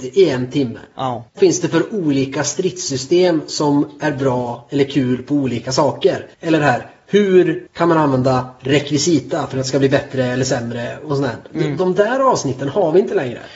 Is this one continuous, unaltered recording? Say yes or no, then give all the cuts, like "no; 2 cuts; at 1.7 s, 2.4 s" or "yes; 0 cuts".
no; 3 cuts; at 1.3 s, 6.3 s, 7.7 s